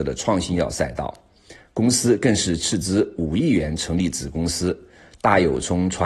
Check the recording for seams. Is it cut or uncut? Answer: uncut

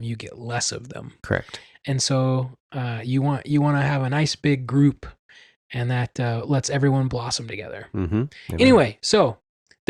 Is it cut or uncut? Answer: uncut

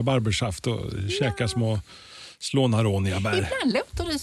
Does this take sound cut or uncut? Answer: uncut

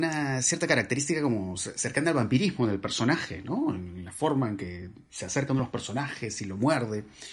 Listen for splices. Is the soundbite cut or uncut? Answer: uncut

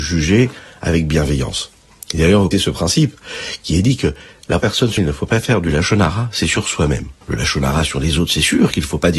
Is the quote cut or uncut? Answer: cut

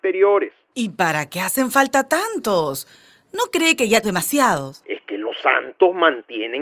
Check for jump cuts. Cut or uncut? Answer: cut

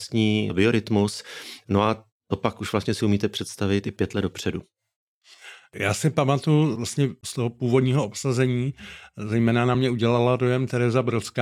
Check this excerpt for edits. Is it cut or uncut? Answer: uncut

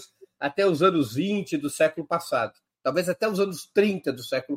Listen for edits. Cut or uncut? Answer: uncut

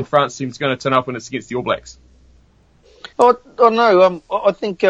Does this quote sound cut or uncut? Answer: cut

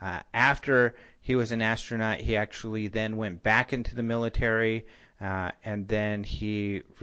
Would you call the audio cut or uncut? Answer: uncut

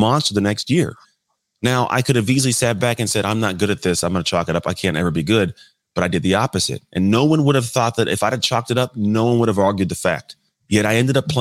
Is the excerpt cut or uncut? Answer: uncut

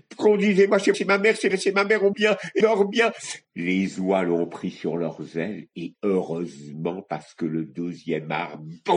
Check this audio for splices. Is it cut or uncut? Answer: cut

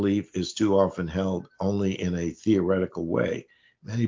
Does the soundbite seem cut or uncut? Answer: uncut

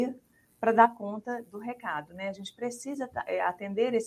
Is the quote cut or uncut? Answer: uncut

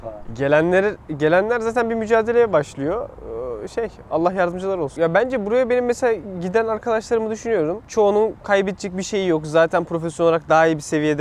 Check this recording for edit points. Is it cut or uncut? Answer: uncut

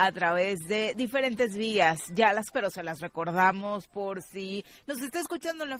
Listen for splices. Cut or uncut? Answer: cut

